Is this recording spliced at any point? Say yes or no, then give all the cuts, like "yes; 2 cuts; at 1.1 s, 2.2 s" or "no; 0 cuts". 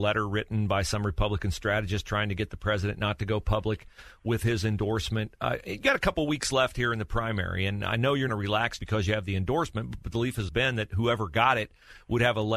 yes; 3 cuts; at 8.3 s, 8.8 s, 10.5 s